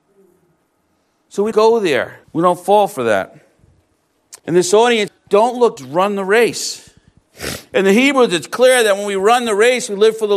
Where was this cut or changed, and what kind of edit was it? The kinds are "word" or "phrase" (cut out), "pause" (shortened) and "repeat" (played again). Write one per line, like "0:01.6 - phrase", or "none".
0:01.5 - word
0:02.2 - pause
0:04.4 - pause
0:05.1 - phrase
0:05.8 - word